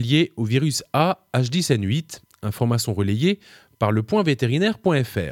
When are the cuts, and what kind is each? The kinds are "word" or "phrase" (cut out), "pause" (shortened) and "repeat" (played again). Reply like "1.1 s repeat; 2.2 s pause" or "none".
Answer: none